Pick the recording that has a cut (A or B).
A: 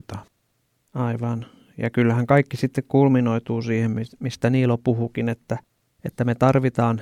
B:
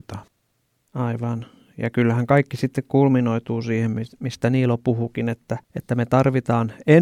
B